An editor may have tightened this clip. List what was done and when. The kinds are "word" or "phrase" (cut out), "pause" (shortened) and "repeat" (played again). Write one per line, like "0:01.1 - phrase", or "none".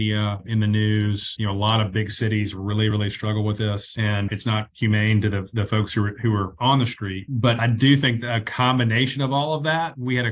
none